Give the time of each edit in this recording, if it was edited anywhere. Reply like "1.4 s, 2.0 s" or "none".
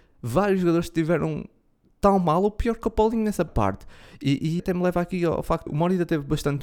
3.5 s, 4.6 s, 5.7 s